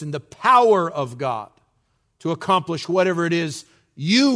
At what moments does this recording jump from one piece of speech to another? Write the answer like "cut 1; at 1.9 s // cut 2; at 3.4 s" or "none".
none